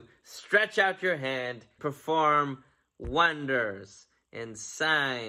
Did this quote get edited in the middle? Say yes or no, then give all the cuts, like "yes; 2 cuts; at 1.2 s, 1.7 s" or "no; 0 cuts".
yes; 1 cut; at 1.8 s